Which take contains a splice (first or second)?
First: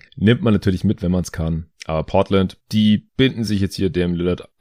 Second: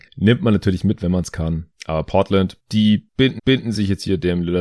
second